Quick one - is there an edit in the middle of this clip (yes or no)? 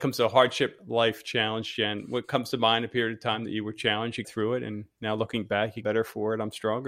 yes